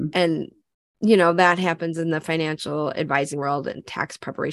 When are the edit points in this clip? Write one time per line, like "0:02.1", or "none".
none